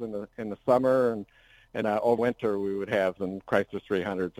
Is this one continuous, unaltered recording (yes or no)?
no